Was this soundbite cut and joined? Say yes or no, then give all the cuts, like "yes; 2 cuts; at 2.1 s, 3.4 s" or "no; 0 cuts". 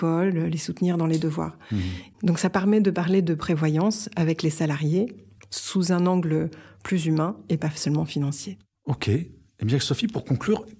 no; 0 cuts